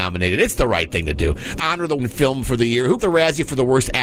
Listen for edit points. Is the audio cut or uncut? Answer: cut